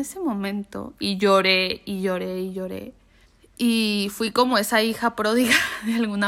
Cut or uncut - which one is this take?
cut